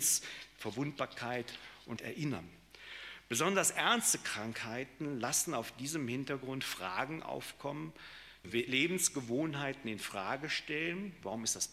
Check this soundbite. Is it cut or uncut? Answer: cut